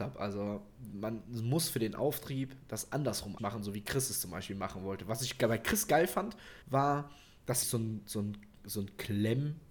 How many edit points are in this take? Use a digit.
3